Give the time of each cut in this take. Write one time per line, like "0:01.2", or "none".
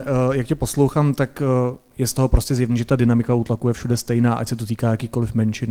none